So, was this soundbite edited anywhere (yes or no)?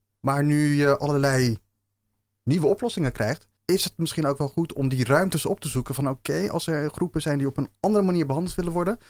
yes